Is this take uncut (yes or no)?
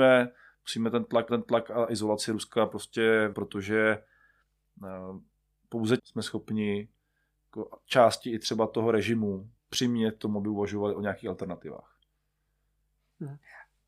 no